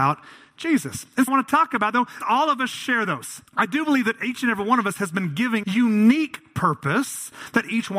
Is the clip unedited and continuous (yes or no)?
no